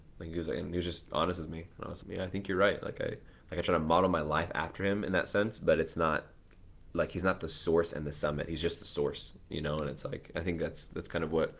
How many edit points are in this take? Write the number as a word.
two